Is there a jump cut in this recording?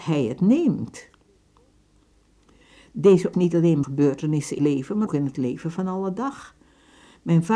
yes; 4 cuts; at 3.3 s, 3.8 s, 4.6 s, 5.1 s

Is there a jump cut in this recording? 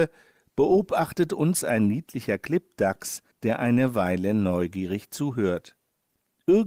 yes; 1 cut; at 3.3 s

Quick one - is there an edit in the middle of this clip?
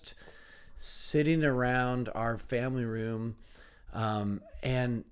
no; 0 cuts

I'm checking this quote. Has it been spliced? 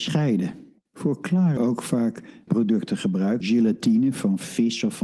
yes; 3 cuts; at 1.6 s, 2.5 s, 3.4 s

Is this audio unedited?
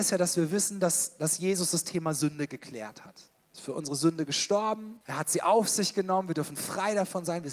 no; 1 cut; at 5.0 s

